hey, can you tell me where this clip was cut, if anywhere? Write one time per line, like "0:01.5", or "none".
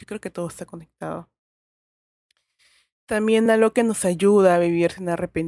none

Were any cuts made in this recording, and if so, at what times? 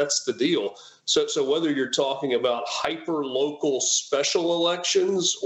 none

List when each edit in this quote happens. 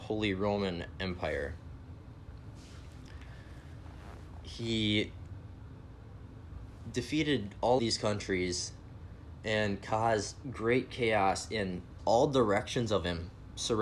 0:07.8
0:10.4
0:12.0

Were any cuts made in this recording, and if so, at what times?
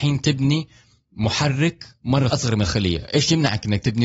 0:02.3

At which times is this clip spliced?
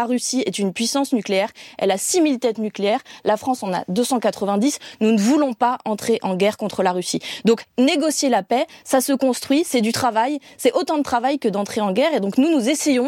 none

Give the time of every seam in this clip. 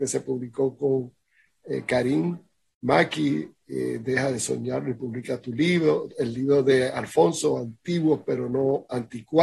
none

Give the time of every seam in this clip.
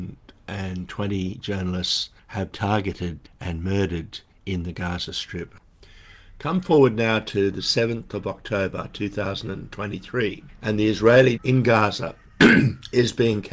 0:02.5
0:11.4

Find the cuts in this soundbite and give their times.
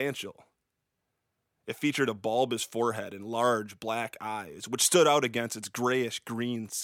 none

